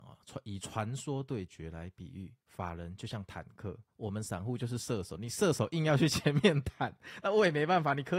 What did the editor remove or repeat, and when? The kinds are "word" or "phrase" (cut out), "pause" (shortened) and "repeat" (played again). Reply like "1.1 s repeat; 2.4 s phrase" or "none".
3.9 s pause